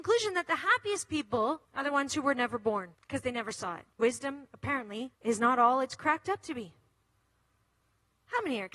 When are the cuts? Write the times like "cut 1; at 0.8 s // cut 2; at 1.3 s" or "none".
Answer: cut 1; at 1.6 s // cut 2; at 2.9 s // cut 3; at 3.9 s // cut 4; at 5.1 s